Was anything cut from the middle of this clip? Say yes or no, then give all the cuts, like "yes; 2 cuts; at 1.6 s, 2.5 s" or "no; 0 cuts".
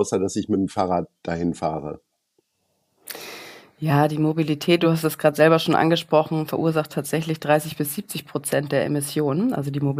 no; 0 cuts